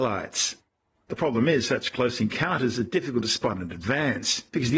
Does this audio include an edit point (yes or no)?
no